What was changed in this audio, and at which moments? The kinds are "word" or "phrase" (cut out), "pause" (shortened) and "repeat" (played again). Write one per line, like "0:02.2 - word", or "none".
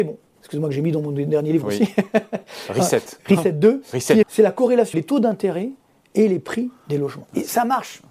0:04.2 - word
0:04.9 - word